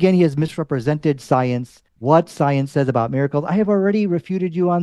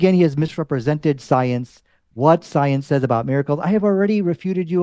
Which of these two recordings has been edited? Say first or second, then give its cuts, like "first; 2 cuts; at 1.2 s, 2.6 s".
first; 1 cut; at 1.9 s